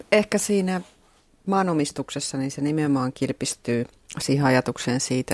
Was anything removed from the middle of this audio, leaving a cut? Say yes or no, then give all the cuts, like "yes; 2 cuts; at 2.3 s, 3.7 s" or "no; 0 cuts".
no; 0 cuts